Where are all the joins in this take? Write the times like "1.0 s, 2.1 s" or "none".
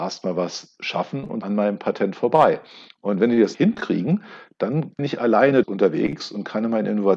1.4 s, 3.5 s, 5.0 s, 5.6 s